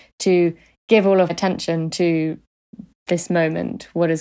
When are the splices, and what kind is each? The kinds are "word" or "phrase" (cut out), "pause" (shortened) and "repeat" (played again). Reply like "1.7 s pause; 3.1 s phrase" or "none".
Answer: 1.3 s word